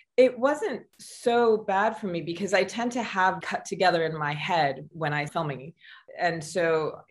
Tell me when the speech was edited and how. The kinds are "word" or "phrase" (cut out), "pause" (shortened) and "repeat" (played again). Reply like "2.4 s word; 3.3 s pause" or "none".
0.9 s pause; 3.4 s phrase; 4.9 s word; 5.3 s word